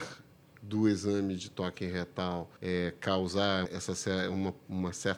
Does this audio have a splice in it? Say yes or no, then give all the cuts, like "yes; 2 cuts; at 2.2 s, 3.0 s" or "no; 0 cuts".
yes; 2 cuts; at 2.6 s, 3.7 s